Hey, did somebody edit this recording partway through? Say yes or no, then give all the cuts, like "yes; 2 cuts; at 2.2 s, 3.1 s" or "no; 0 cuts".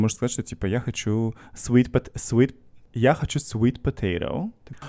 no; 0 cuts